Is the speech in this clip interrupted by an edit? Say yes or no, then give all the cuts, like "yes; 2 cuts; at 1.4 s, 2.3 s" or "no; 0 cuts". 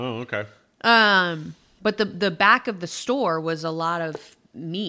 no; 0 cuts